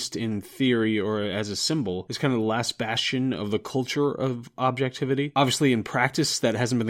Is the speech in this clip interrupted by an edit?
no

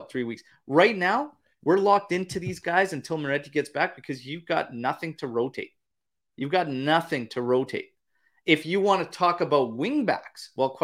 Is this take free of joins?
yes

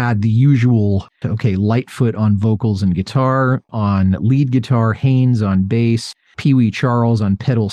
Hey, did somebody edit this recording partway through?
yes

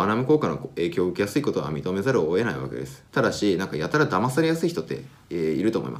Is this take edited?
yes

